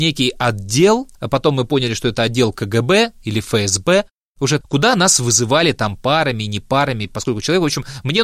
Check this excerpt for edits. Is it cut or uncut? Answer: cut